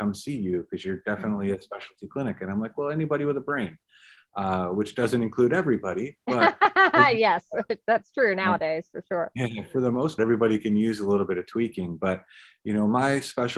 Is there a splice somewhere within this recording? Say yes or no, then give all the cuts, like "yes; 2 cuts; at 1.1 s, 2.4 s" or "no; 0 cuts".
yes; 1 cut; at 10.2 s